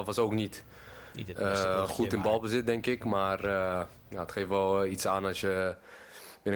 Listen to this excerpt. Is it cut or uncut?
cut